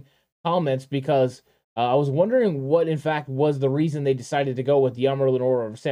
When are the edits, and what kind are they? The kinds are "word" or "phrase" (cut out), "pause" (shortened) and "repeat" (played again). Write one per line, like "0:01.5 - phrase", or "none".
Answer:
none